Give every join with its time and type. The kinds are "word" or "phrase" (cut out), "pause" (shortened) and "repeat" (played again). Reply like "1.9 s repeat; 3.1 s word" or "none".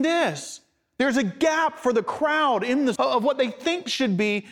3.0 s word

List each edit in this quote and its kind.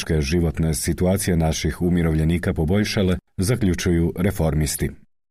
none

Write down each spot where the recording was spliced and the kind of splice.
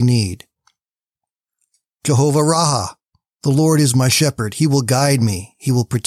none

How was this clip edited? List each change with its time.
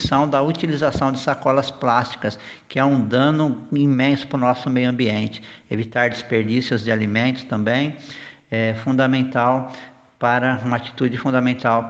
none

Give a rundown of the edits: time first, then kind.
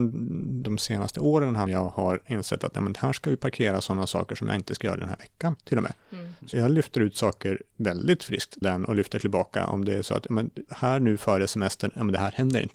1.7 s phrase; 5.6 s pause; 6.5 s word; 8.6 s word

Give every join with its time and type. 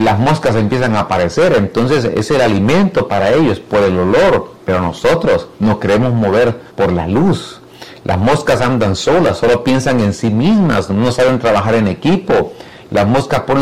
4.6 s pause; 5.5 s pause; 6.7 s pause

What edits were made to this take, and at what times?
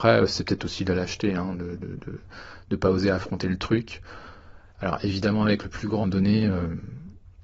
6.0 s phrase

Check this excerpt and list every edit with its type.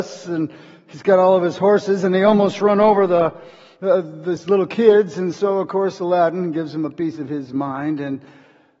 none

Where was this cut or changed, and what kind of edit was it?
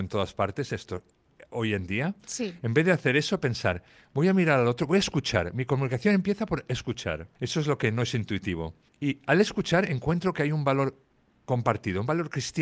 7.3 s pause; 8.9 s pause

